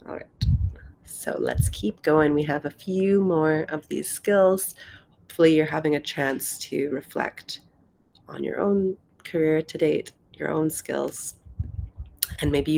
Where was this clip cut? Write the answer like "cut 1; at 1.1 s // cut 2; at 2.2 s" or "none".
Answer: none

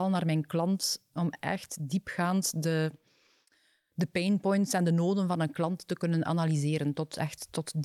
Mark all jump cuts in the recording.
none

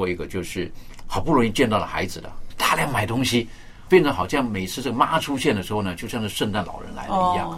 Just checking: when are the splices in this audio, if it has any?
cut 1; at 2.5 s // cut 2; at 3.9 s

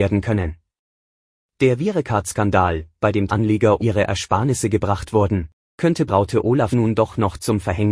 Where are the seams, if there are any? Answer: cut 1; at 3.3 s // cut 2; at 3.8 s // cut 3; at 6.1 s // cut 4; at 6.7 s

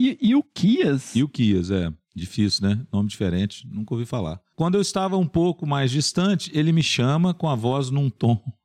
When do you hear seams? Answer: none

